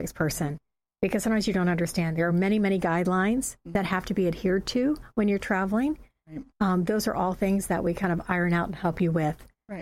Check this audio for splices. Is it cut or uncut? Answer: uncut